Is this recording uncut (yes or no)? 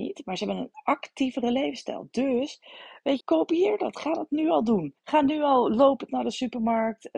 no